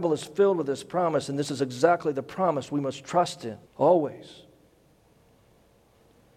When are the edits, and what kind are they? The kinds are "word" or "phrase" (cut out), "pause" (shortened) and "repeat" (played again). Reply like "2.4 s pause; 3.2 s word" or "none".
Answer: 3.7 s pause